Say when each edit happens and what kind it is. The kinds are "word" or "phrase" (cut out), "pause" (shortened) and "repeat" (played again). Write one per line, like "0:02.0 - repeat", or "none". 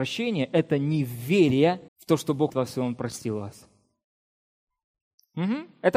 0:01.9 - pause
0:02.5 - word